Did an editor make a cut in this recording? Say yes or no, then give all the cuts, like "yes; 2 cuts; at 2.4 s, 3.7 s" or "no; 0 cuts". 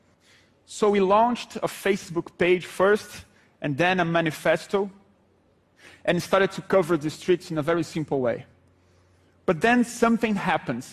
no; 0 cuts